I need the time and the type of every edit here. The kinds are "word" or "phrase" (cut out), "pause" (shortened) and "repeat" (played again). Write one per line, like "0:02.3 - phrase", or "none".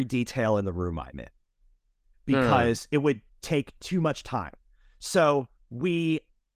none